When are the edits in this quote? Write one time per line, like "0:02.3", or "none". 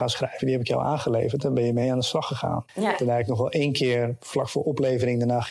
0:02.7